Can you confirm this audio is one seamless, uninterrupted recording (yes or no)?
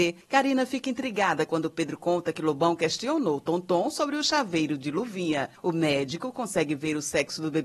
yes